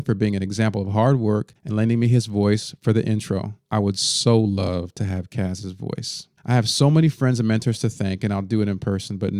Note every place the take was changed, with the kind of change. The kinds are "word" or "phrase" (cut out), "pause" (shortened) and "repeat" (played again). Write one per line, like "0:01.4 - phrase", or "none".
0:01.6 - pause
0:03.6 - pause
0:06.4 - pause